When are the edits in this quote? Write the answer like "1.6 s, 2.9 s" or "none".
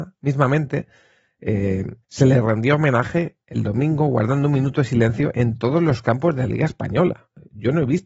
2.0 s